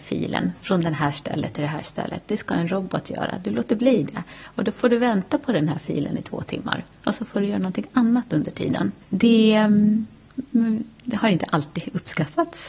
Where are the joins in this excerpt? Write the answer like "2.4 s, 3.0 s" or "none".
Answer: 9.0 s